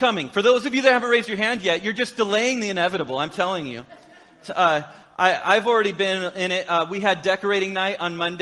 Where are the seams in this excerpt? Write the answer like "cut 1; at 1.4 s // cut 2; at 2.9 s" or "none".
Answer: none